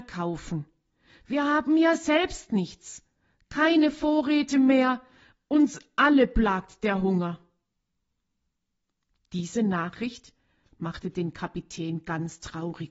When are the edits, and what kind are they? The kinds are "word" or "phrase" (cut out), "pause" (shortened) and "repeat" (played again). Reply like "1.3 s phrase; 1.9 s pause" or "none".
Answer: none

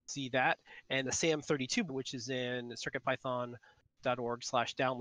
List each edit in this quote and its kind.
1.0 s word; 1.9 s word

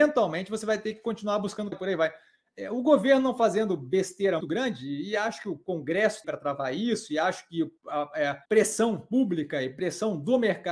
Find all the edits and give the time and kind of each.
1.7 s word; 4.4 s word; 6.2 s word; 7.8 s pause; 8.4 s pause

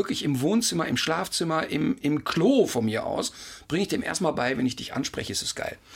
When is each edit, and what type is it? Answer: none

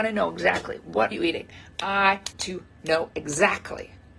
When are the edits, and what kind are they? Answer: 1.1 s word; 2.3 s word

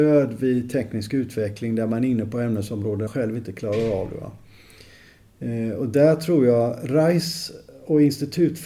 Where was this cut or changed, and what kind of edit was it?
3.1 s word

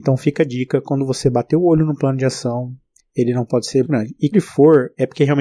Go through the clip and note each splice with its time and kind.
3.0 s pause; 3.8 s word; 4.3 s word

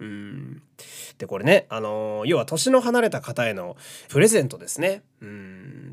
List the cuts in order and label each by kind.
4.1 s phrase

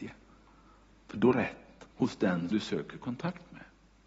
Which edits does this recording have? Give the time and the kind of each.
1.3 s phrase; 1.9 s pause; 2.5 s word

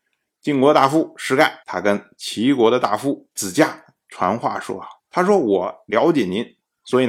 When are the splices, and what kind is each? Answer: 1.6 s pause; 3.3 s pause; 5.0 s pause

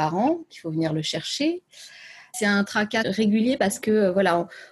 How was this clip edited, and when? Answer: none

